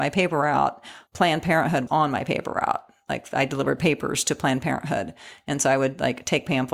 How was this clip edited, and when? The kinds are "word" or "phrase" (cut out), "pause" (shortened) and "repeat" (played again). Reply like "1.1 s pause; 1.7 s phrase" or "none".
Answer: 1.1 s pause; 1.9 s word

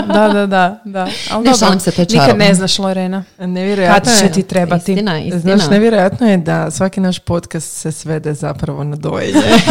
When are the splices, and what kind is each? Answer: none

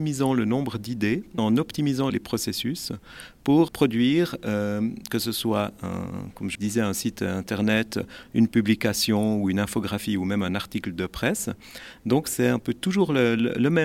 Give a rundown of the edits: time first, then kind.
1.4 s word; 2.1 s word; 3.7 s word; 6.5 s word

